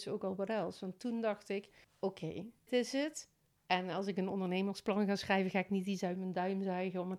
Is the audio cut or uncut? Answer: cut